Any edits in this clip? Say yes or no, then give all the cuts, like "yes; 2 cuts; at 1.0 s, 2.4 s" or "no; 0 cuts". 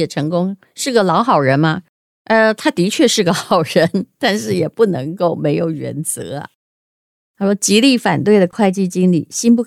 no; 0 cuts